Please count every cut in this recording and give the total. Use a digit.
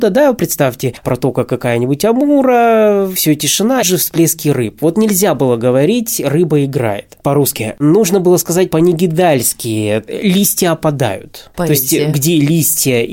1